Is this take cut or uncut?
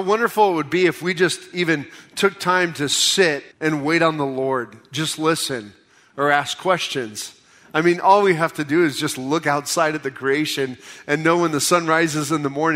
cut